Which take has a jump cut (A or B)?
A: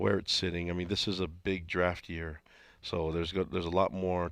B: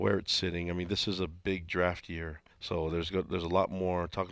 B